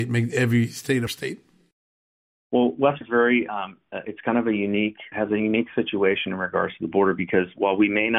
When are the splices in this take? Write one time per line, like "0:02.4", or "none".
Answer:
0:01.1
0:03.0
0:05.1

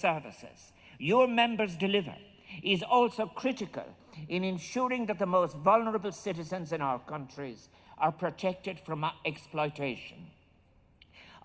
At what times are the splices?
none

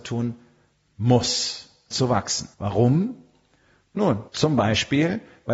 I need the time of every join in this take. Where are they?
0:01.9
0:02.5
0:04.3

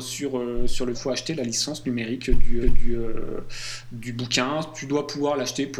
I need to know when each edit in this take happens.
0:00.9
0:02.6

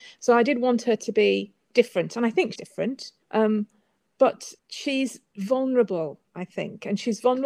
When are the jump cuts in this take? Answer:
0:02.6
0:03.2
0:04.6

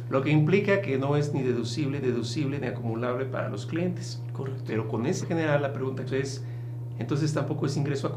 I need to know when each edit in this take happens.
0:02.0
0:05.2
0:06.1

